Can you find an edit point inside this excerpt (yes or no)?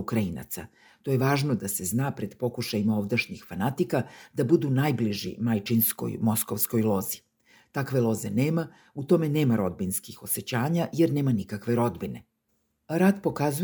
no